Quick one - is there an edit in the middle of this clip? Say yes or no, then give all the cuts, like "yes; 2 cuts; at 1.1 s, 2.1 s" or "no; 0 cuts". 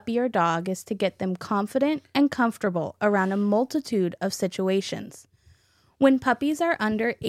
no; 0 cuts